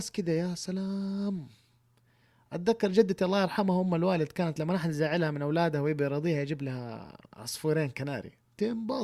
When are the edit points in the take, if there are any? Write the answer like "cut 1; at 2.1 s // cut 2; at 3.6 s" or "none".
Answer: none